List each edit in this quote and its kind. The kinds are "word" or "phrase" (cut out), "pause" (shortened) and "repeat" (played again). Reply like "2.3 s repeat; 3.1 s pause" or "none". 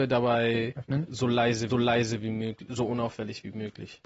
1.7 s repeat